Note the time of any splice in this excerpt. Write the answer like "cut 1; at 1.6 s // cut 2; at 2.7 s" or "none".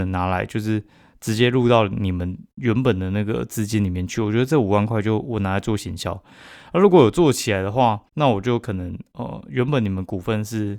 cut 1; at 8.1 s